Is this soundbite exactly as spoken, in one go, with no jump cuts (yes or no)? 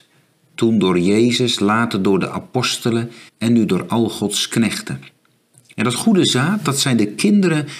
no